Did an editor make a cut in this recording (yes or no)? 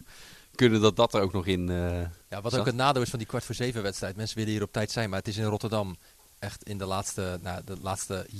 yes